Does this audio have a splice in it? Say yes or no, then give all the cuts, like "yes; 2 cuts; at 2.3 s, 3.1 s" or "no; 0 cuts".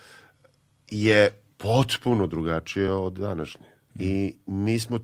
no; 0 cuts